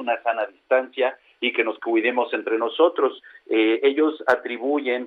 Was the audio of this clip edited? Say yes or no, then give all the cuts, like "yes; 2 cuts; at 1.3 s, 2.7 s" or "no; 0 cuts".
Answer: no; 0 cuts